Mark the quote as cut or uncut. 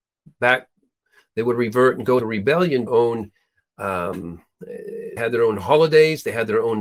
cut